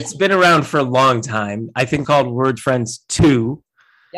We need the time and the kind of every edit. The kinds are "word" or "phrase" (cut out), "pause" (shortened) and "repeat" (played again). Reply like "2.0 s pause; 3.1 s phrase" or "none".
2.0 s phrase; 2.6 s word